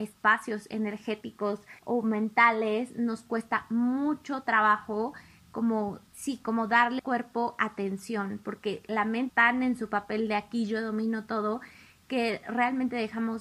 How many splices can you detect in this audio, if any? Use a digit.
4